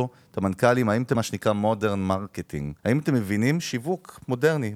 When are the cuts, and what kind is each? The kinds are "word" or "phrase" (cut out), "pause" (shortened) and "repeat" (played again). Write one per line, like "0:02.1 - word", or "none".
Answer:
0:01.1 - word
0:02.8 - pause